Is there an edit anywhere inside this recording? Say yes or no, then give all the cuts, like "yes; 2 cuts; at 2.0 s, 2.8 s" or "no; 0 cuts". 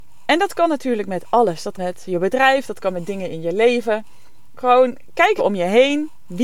yes; 2 cuts; at 1.8 s, 5.4 s